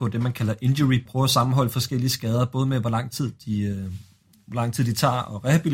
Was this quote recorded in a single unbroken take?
no; 1 cut; at 1.1 s

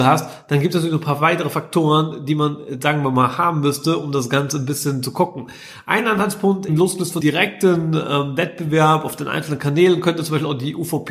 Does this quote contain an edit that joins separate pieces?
yes; 2 cuts; at 6.7 s, 7.2 s

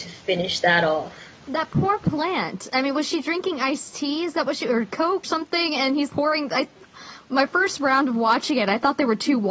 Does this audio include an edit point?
yes; 2 cuts; at 5.2 s, 6.1 s

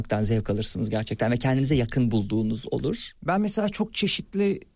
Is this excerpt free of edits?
yes; 0 cuts

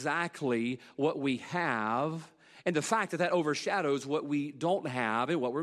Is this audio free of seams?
yes; 0 cuts

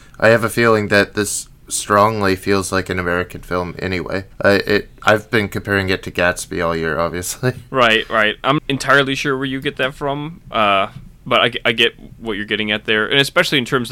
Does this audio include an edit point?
yes; 2 cuts; at 4.3 s, 8.6 s

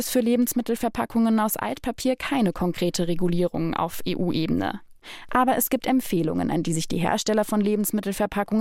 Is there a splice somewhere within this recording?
no; 0 cuts

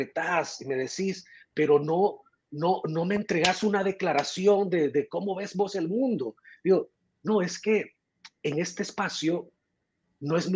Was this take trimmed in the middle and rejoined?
no; 0 cuts

